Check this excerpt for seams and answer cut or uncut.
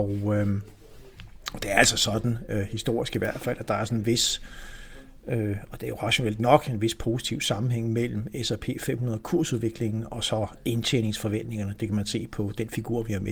uncut